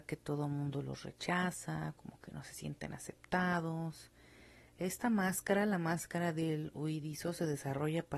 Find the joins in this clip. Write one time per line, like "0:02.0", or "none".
none

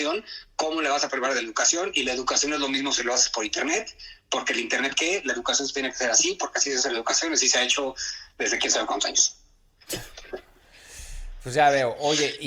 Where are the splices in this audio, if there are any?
none

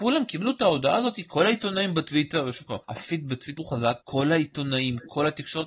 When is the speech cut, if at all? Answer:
0:02.8
0:03.6
0:04.0

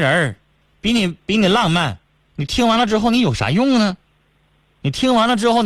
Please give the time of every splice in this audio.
0:02.1

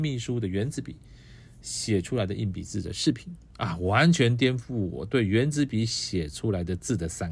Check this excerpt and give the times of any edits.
none

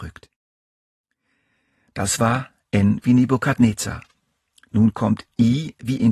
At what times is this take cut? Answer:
none

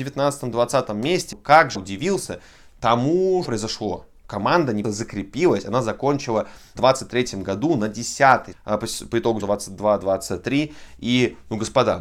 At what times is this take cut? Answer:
0:01.3
0:01.7
0:03.4
0:04.8
0:06.8
0:08.5
0:09.4

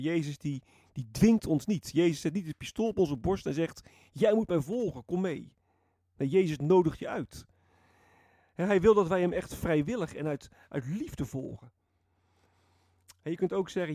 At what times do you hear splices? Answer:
none

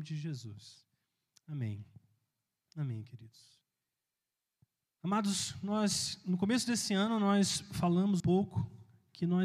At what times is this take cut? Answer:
0:08.2

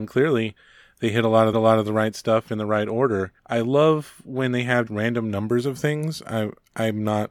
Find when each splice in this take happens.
0:01.5
0:03.4
0:04.9

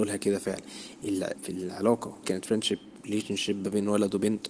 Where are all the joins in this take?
0:01.3
0:02.2

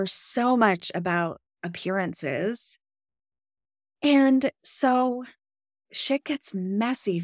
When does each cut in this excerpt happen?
none

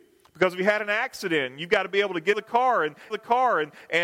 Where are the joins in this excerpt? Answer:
0:02.3
0:03.1

